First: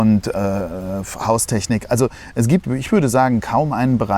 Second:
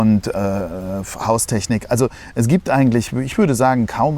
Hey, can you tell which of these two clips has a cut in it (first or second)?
first